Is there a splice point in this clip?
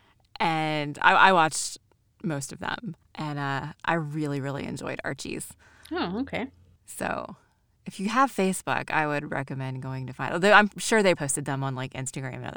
yes; 2 cuts; at 3.0 s, 11.2 s

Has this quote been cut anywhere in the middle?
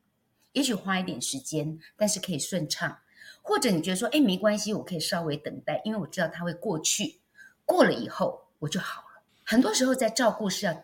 yes; 2 cuts; at 8.5 s, 9.3 s

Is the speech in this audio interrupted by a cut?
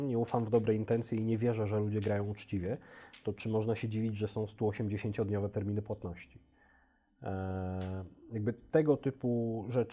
no; 0 cuts

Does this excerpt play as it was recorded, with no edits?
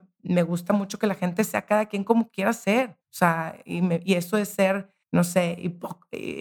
no; 2 cuts; at 3.0 s, 5.0 s

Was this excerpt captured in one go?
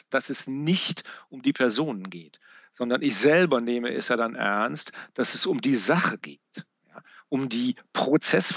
yes; 0 cuts

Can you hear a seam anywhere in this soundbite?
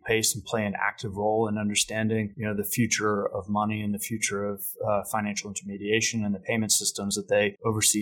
no; 0 cuts

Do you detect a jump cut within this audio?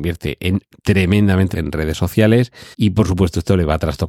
yes; 2 cuts; at 1.5 s, 2.7 s

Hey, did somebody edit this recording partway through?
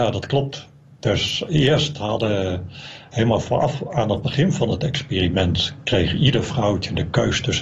no; 0 cuts

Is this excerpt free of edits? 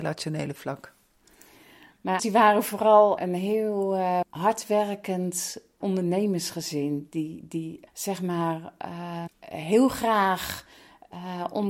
no; 6 cuts; at 2.2 s, 3.2 s, 4.2 s, 5.8 s, 7.9 s, 9.3 s

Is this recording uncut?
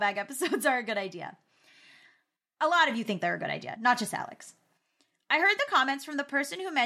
yes; 0 cuts

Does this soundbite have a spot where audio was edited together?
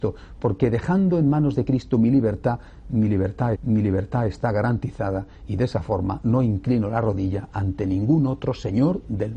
yes; 1 cut; at 3.6 s

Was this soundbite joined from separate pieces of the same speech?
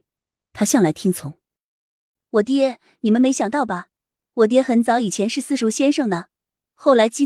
no; 0 cuts

